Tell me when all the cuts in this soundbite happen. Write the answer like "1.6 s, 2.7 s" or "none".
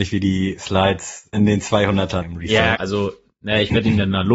1.3 s, 2.2 s, 2.7 s